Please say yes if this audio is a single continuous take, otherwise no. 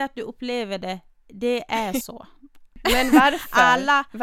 yes